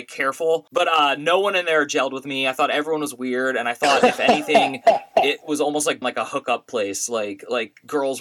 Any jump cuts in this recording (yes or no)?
yes